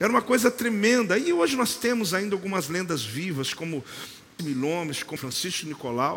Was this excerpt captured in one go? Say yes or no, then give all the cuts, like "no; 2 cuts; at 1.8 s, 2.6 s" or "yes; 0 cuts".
no; 2 cuts; at 4.4 s, 5.2 s